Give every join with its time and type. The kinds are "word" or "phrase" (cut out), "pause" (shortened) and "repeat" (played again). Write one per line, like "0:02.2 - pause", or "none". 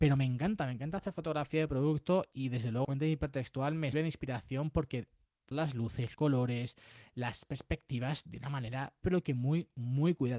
0:02.8 - word
0:03.9 - word
0:05.5 - word
0:06.1 - word
0:09.0 - word